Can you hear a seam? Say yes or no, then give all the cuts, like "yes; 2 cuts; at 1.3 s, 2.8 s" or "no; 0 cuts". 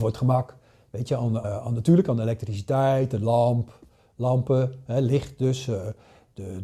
yes; 1 cut; at 1.4 s